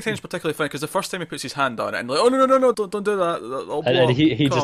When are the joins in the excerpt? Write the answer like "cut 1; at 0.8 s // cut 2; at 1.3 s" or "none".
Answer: cut 1; at 2.7 s